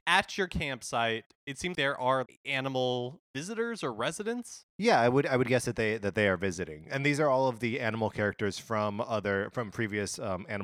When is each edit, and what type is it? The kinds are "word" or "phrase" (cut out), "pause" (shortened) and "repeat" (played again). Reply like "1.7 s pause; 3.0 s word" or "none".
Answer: 1.7 s word; 2.3 s word; 3.3 s pause; 4.7 s pause